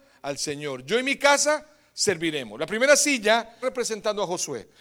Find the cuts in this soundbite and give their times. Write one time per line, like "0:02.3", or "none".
0:03.6